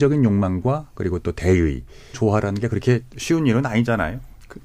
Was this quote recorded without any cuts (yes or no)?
no